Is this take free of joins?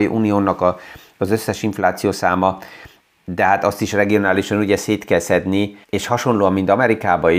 no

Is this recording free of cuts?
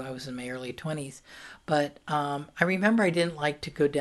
yes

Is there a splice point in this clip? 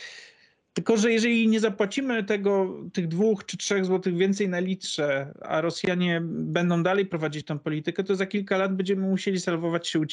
no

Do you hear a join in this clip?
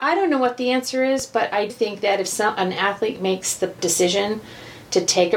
yes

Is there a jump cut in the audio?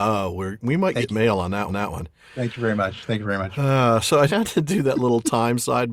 yes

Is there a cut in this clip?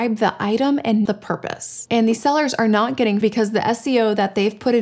yes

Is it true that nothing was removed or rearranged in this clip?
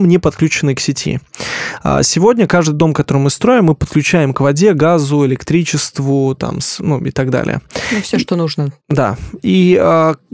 no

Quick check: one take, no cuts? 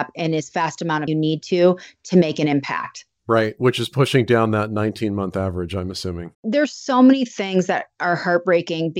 no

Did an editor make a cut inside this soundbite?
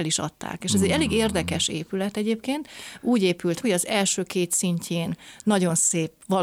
yes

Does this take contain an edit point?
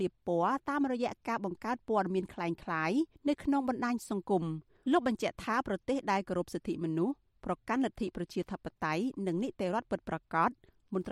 yes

